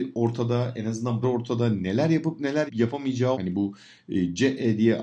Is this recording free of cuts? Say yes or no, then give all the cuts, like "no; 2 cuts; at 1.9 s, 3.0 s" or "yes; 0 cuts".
no; 3 cuts; at 1.2 s, 2.7 s, 3.3 s